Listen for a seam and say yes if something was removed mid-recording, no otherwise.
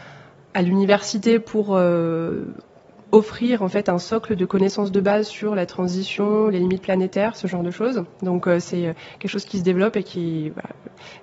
no